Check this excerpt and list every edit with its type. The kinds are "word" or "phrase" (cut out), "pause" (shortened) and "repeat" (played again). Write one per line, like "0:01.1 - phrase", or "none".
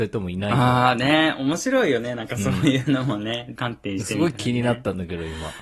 0:03.6 - word